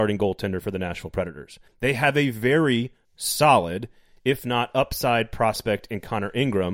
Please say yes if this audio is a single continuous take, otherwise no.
no